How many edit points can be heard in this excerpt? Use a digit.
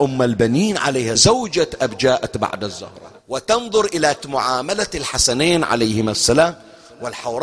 3